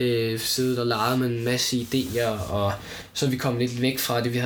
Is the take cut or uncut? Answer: uncut